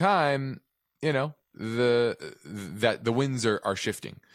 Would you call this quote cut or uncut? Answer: uncut